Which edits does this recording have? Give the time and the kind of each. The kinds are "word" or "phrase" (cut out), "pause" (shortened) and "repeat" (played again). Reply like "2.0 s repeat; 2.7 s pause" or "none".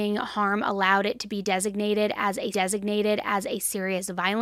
2.5 s repeat